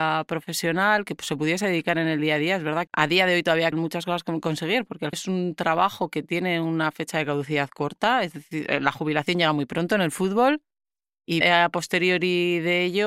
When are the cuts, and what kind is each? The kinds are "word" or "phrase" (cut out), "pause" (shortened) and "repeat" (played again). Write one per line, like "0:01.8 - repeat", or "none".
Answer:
0:02.9 - word
0:03.7 - word
0:05.1 - word
0:11.4 - word